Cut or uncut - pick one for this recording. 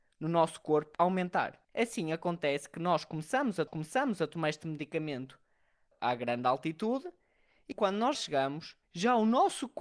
cut